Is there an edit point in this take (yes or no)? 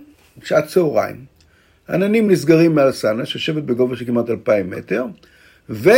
no